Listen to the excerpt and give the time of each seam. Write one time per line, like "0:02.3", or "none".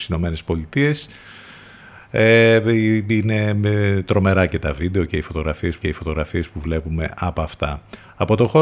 0:05.8